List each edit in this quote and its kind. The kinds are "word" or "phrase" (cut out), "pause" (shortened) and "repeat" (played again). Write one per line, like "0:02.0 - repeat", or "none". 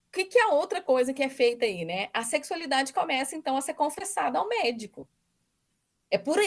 none